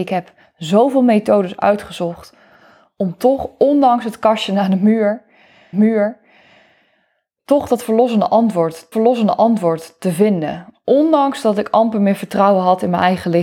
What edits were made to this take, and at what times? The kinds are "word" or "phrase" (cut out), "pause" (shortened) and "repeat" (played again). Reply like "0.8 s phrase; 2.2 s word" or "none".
5.7 s repeat; 8.9 s repeat